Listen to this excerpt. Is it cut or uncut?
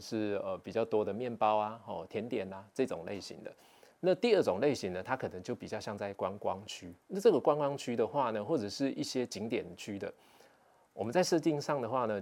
uncut